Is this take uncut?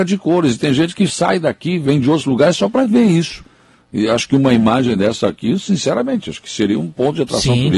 yes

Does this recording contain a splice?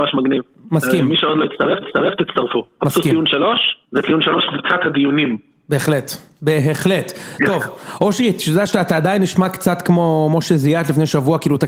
yes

